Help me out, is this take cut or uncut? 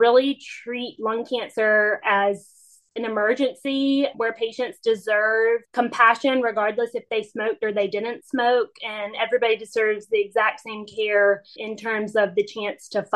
cut